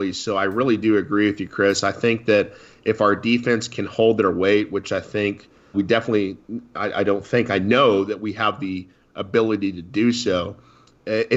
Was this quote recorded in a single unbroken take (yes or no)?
no